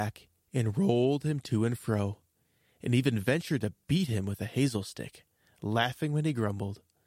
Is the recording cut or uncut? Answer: uncut